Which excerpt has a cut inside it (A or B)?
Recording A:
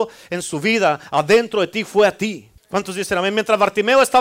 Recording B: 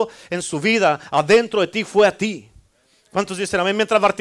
A